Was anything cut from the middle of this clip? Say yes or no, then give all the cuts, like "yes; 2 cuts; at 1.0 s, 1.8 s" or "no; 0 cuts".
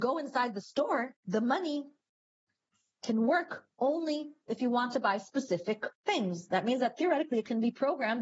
yes; 2 cuts; at 1.2 s, 6.0 s